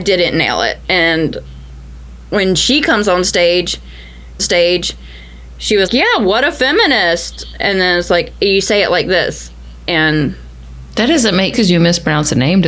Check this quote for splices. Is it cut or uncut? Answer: cut